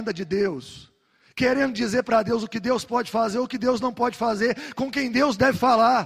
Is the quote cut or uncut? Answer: uncut